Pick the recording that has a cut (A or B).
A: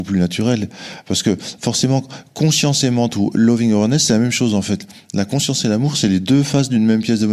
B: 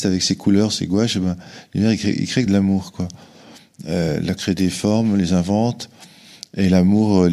B